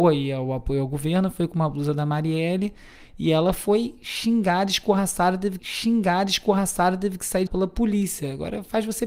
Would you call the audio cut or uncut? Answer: cut